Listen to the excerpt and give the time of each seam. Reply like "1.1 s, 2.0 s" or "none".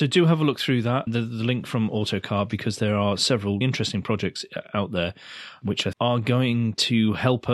1.1 s, 3.6 s, 5.9 s

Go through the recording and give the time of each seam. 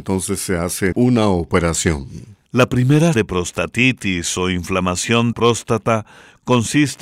0.9 s, 3.1 s, 5.3 s

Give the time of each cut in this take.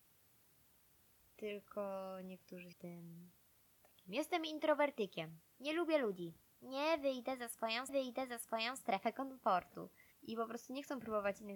2.7 s, 7.9 s, 10.1 s

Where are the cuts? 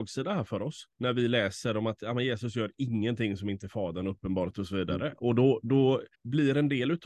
0.9 s, 6.1 s

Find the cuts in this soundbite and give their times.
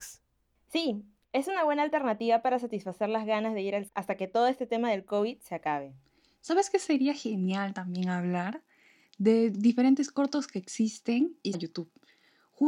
3.9 s, 11.5 s

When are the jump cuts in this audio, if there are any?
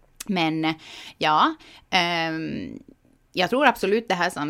none

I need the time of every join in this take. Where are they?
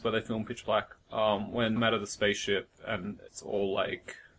1.0 s, 1.8 s, 3.3 s

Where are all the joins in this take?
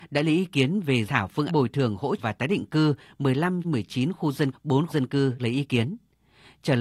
1.1 s, 1.5 s, 2.2 s, 3.6 s, 4.5 s, 4.9 s, 5.4 s

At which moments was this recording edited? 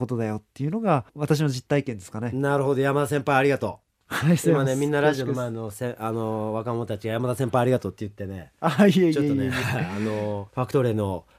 1.1 s, 10.5 s

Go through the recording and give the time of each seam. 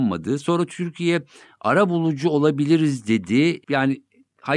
3.6 s

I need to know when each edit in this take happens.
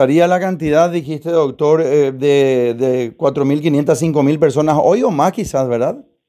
none

